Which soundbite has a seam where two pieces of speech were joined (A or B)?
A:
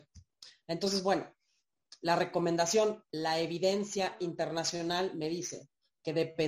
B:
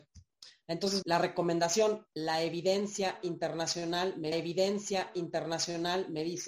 B